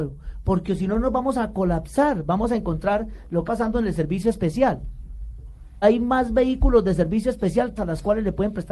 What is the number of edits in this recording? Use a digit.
3